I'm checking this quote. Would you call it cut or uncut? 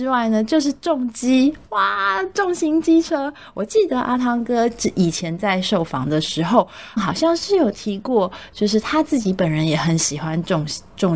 cut